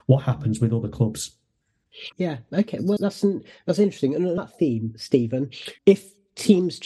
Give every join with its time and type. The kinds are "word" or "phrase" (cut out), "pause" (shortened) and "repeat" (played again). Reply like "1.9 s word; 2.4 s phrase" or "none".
2.1 s word; 3.0 s word; 4.4 s word; 5.8 s word